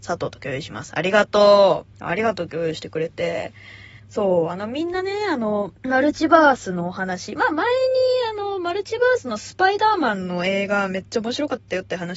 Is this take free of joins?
no; 3 cuts; at 1.9 s, 4.0 s, 5.8 s

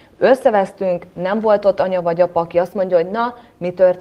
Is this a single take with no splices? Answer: yes; 0 cuts

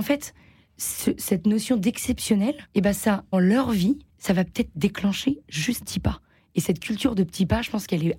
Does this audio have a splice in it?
yes; 4 cuts; at 2.7 s, 3.3 s, 4.1 s, 5.8 s

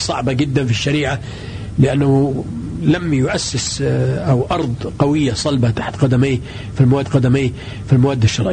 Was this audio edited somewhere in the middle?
yes; 1 cut; at 7.0 s

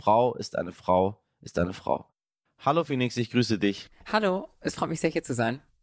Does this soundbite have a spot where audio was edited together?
no; 0 cuts

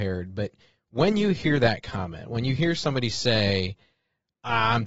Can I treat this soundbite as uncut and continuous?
yes; 0 cuts

